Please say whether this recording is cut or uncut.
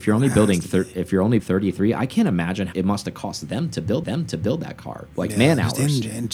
cut